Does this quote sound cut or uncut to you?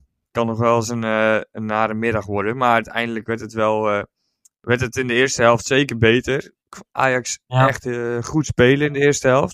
uncut